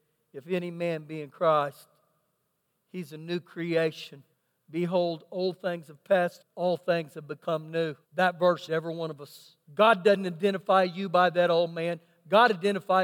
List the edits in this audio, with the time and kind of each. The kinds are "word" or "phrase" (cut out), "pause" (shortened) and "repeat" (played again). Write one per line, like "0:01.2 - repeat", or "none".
0:04.3 - pause
0:06.4 - word
0:08.0 - pause
0:08.7 - phrase
0:09.6 - pause